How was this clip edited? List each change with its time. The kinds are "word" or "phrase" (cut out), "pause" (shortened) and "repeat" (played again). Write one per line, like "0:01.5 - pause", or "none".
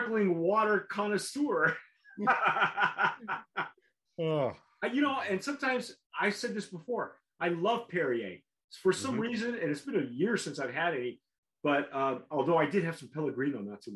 0:06.1 - pause